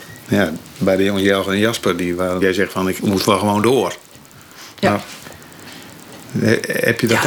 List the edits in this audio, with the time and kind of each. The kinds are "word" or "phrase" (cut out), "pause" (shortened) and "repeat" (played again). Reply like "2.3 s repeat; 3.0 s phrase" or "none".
2.4 s word; 3.0 s phrase